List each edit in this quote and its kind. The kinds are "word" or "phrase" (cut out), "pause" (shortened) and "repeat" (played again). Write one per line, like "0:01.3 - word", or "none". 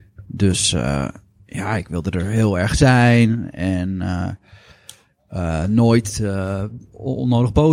none